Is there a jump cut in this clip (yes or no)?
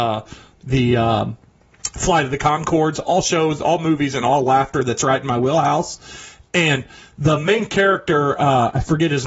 no